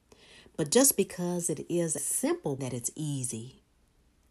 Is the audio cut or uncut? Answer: cut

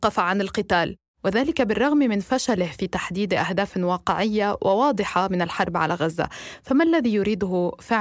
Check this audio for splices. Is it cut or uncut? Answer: uncut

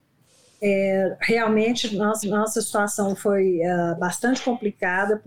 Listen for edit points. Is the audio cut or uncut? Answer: cut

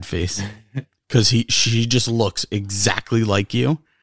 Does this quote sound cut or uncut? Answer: uncut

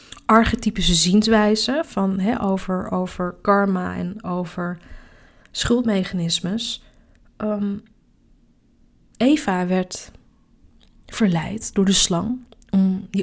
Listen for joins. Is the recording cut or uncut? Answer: uncut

